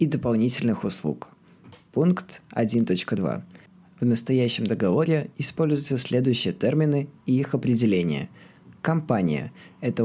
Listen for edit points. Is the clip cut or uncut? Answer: uncut